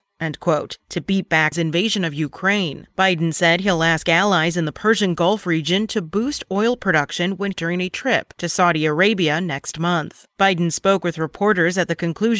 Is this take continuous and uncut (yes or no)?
no